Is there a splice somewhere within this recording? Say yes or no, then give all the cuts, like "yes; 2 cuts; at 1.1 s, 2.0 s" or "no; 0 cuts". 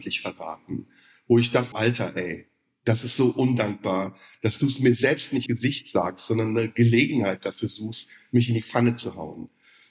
yes; 2 cuts; at 1.7 s, 5.5 s